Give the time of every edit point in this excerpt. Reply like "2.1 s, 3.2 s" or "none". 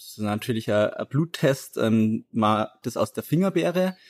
2.8 s